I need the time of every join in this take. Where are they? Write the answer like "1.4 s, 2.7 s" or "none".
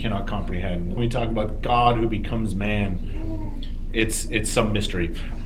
1.0 s